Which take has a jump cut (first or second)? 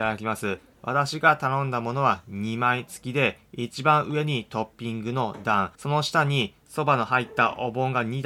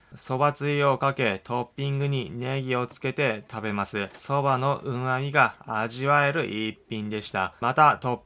first